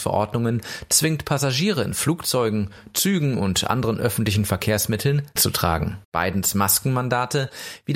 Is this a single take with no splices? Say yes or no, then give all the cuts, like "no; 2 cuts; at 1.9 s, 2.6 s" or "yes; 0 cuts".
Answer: no; 2 cuts; at 5.4 s, 6.0 s